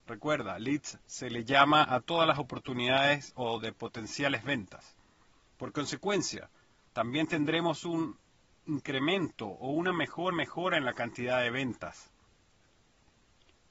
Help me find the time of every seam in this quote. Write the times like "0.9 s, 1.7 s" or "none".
1.0 s, 10.3 s